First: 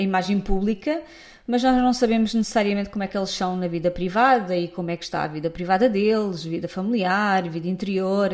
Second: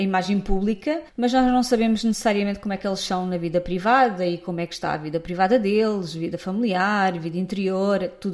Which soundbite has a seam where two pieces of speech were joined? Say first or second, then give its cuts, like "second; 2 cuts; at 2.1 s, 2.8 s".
second; 1 cut; at 1.1 s